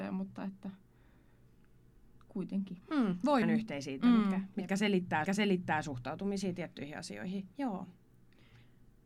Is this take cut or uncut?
cut